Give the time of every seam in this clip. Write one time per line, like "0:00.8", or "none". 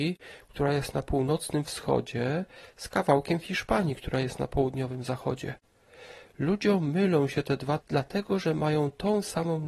0:07.8